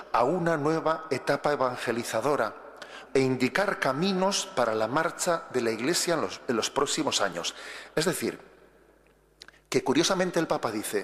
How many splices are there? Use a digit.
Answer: 1